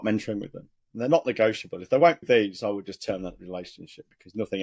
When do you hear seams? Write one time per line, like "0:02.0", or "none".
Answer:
0:02.2